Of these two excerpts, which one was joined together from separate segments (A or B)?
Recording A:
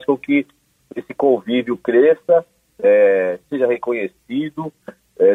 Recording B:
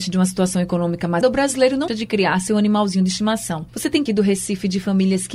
B